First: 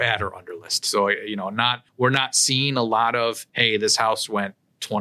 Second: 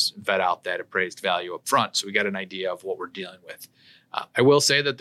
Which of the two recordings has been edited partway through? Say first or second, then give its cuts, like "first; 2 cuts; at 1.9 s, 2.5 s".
first; 2 cuts; at 1.9 s, 3.5 s